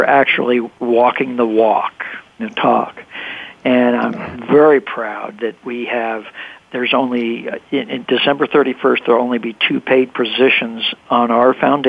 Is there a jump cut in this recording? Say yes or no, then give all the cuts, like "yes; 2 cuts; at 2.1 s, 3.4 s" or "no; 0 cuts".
yes; 1 cut; at 2.4 s